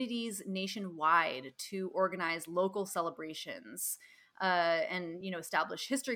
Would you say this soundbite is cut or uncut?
uncut